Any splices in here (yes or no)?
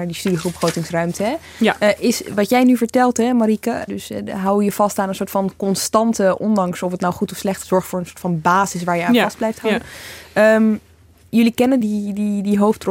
yes